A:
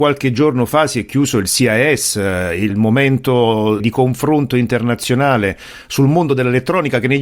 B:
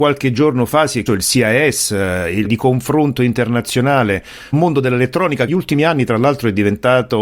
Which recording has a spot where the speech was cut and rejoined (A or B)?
B